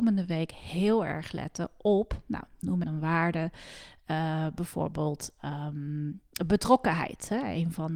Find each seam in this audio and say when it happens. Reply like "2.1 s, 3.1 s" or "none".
2.8 s

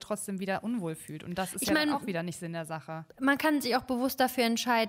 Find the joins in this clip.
3.1 s

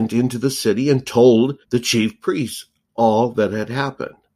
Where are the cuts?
1.6 s

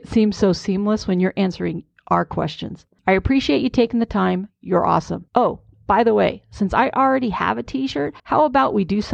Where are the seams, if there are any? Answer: 3.0 s, 5.3 s, 8.2 s

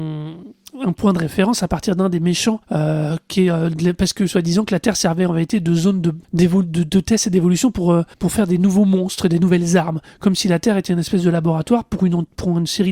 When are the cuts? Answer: 2.6 s, 6.2 s, 8.1 s

